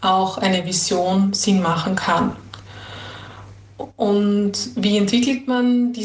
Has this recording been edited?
no; 0 cuts

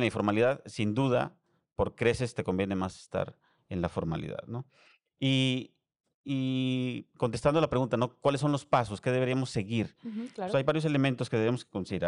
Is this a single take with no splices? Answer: yes; 0 cuts

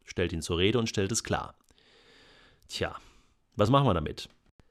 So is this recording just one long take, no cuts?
yes; 0 cuts

